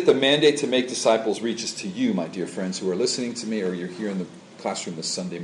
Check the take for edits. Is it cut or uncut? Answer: uncut